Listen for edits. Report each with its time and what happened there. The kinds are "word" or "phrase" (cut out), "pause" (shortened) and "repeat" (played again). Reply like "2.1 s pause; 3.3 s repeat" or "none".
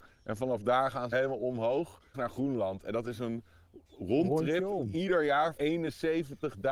1.1 s word; 2.1 s word; 3.9 s pause; 5.6 s word